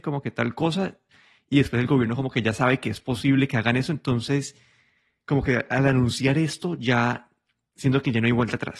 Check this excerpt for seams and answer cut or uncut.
uncut